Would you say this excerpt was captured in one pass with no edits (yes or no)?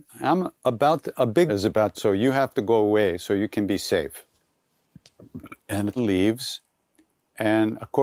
no